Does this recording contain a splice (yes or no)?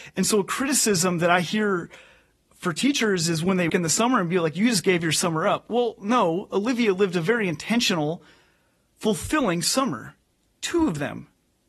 yes